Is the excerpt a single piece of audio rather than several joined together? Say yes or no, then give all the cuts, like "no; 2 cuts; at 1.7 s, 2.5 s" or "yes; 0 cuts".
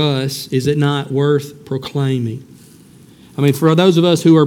yes; 0 cuts